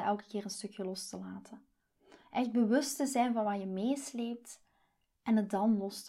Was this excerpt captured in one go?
yes; 0 cuts

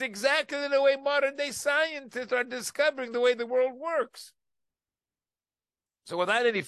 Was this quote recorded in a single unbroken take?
yes; 0 cuts

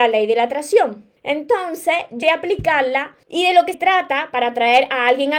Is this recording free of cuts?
no; 4 cuts; at 1.2 s, 2.2 s, 3.2 s, 3.7 s

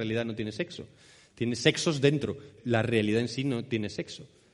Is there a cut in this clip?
yes; 1 cut; at 2.6 s

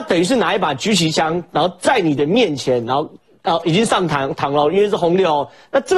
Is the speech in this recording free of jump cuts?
yes; 0 cuts

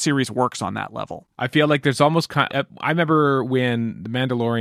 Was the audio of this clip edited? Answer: yes; 2 cuts; at 1.3 s, 2.5 s

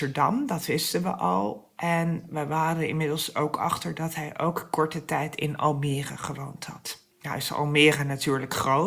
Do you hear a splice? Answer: yes; 1 cut; at 7.1 s

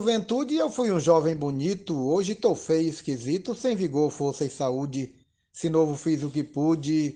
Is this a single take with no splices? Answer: yes; 0 cuts

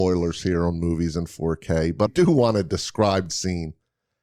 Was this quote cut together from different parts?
yes; 2 cuts; at 2.1 s, 3.3 s

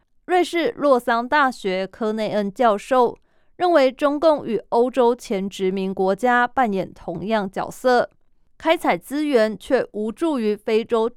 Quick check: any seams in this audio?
no; 0 cuts

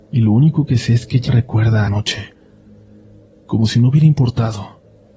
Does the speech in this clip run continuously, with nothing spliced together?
no; 2 cuts; at 1.3 s, 1.9 s

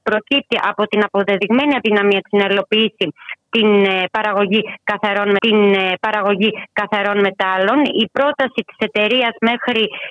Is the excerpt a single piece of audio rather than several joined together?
no; 1 cut; at 5.4 s

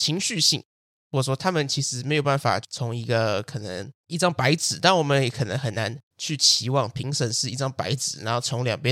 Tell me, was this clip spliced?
yes; 2 cuts; at 4.0 s, 6.1 s

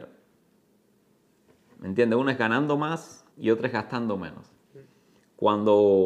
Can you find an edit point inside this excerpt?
yes; 2 cuts; at 3.3 s, 4.6 s

